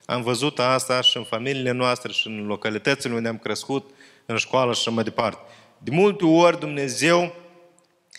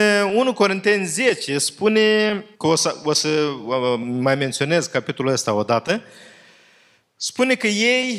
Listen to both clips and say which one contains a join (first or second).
second